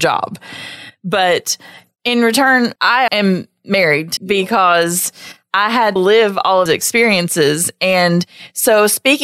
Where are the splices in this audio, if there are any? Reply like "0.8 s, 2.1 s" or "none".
2.8 s, 3.1 s, 4.2 s, 6.0 s, 6.7 s